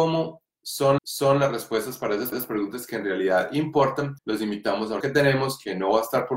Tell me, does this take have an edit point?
yes; 4 cuts; at 1.0 s, 2.3 s, 4.2 s, 5.0 s

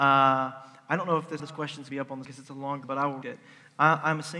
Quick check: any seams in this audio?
yes; 5 cuts; at 1.4 s, 1.9 s, 2.2 s, 2.8 s, 3.2 s

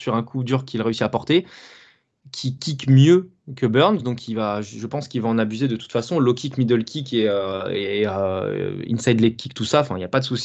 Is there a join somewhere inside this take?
no; 0 cuts

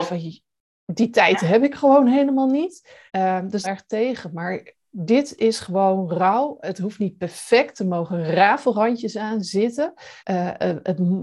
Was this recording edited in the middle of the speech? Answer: yes; 3 cuts; at 3.1 s, 3.6 s, 10.2 s

